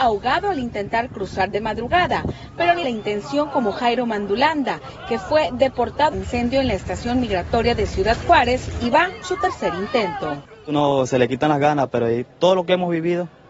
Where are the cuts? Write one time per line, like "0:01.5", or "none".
0:02.8
0:06.1
0:09.2